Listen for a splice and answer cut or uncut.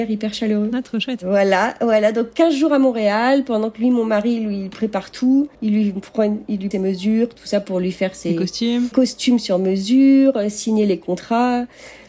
cut